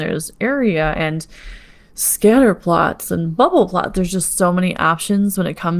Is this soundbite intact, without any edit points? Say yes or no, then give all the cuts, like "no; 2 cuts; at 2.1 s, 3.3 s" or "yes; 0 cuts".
yes; 0 cuts